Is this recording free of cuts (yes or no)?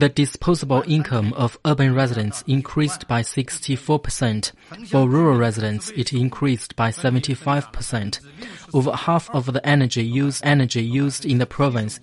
no